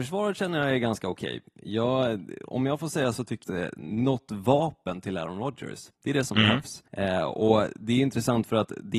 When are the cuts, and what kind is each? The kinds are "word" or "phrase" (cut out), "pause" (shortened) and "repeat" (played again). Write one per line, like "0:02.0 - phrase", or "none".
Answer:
0:03.4 - phrase
0:06.0 - pause
0:06.9 - pause